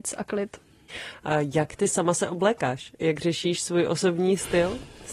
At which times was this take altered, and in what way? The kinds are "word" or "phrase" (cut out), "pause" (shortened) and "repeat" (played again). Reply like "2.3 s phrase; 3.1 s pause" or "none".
none